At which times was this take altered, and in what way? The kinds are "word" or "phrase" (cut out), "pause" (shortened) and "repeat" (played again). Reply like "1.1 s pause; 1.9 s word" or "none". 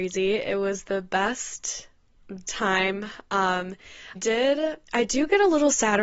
2.5 s word; 4.1 s word; 4.8 s pause